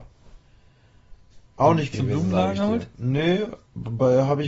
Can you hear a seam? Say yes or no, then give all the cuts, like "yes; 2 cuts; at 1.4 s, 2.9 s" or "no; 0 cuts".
yes; 1 cut; at 1.9 s